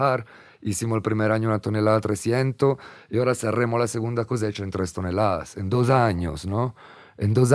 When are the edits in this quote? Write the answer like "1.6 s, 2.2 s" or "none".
none